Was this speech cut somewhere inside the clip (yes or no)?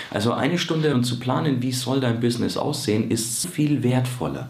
yes